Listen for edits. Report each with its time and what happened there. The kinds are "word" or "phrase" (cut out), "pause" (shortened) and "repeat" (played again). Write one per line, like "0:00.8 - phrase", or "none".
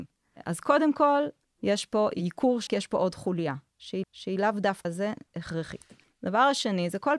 0:01.4 - pause
0:02.7 - word
0:04.0 - repeat
0:04.8 - word
0:06.0 - pause